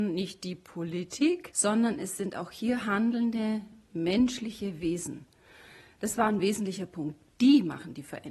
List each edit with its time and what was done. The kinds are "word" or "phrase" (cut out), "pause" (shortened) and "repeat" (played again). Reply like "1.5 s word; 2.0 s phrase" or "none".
none